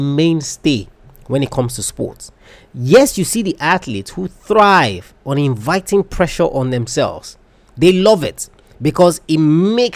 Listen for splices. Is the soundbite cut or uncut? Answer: uncut